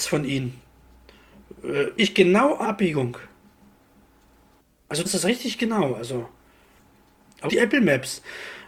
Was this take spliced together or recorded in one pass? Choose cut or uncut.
cut